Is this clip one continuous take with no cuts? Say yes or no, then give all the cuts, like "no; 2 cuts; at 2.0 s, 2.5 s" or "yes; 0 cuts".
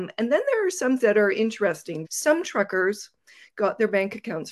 no; 2 cuts; at 1.0 s, 2.0 s